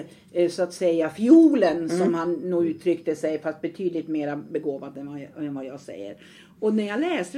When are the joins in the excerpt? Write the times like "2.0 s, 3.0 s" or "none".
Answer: none

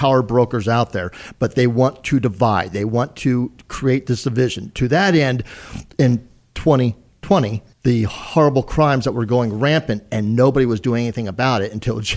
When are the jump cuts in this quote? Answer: 5.9 s, 7.7 s

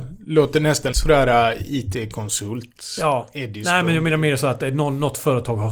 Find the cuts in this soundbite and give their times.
0.9 s

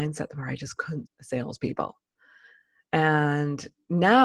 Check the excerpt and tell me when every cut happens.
1.1 s

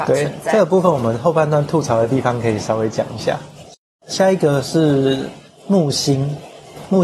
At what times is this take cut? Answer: none

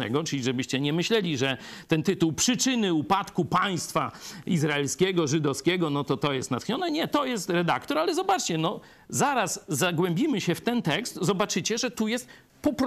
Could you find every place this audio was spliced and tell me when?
none

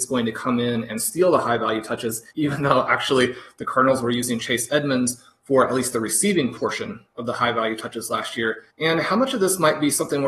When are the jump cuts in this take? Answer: 2.3 s, 8.7 s

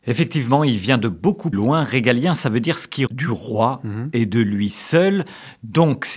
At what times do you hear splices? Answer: 1.5 s, 3.1 s

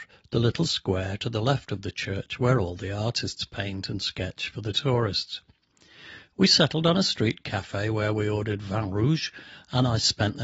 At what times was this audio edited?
none

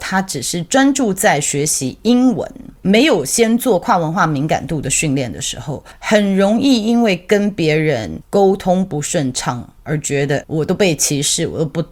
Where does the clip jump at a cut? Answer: 10.4 s

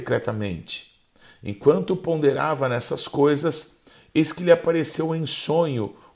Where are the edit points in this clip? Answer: none

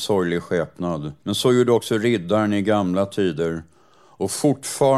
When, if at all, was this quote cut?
1.2 s

